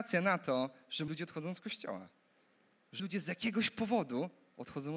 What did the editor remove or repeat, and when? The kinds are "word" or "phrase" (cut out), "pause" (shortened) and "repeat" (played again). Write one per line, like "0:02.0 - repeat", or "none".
0:01.1 - word
0:03.0 - word